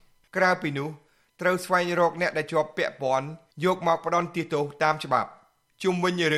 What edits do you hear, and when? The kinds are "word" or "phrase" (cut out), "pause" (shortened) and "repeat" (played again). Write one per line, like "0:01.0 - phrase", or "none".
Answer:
none